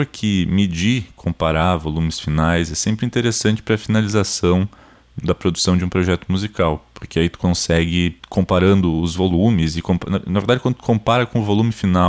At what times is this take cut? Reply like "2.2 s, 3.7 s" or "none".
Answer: 5.2 s